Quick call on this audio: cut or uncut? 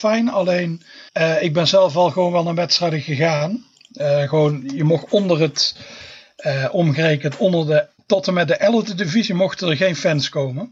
cut